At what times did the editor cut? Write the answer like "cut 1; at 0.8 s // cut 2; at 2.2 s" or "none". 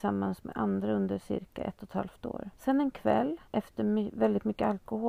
cut 1; at 2.5 s // cut 2; at 3.5 s